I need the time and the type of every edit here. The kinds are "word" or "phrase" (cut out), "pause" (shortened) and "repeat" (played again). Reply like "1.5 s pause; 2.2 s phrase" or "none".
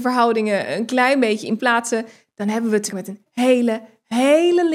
1.6 s word; 2.9 s word; 3.3 s word